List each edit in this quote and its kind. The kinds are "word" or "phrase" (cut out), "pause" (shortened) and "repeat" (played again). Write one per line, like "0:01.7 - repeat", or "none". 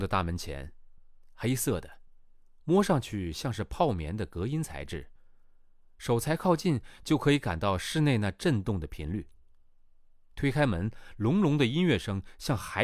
none